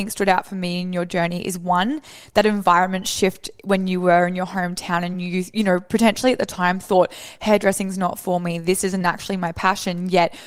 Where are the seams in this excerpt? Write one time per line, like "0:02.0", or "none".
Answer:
none